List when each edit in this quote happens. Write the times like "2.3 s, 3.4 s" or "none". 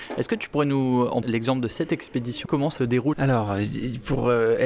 1.2 s, 2.4 s, 2.8 s, 3.1 s